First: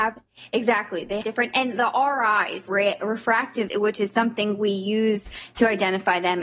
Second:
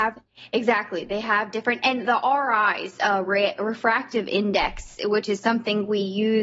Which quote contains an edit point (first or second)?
first